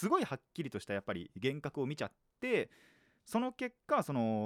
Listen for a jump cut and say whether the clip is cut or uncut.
uncut